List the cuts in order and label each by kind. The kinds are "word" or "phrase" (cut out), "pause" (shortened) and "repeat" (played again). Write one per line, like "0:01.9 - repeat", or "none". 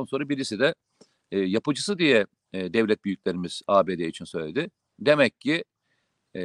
none